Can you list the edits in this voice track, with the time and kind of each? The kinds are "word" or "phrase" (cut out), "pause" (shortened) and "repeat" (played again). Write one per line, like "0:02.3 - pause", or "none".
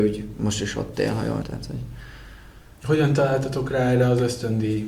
0:01.4 - word